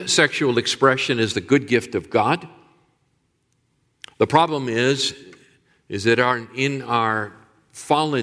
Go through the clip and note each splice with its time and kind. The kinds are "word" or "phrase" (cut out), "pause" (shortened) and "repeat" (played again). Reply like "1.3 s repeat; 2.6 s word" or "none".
none